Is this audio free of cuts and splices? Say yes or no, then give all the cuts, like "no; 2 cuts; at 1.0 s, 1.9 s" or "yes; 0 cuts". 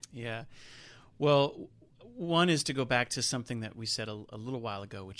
yes; 0 cuts